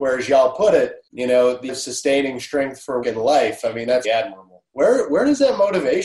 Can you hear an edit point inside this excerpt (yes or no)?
yes